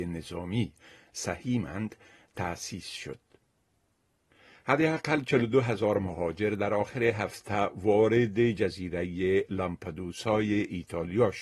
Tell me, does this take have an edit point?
no; 0 cuts

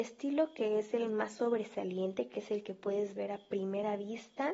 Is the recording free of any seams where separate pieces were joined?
yes; 0 cuts

